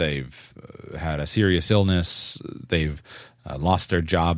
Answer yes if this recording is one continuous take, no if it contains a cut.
yes